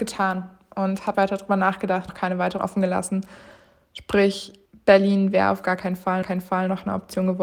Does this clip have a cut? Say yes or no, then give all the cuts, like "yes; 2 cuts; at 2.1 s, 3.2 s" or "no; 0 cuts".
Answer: yes; 5 cuts; at 1.1 s, 2.1 s, 2.6 s, 4.7 s, 6.2 s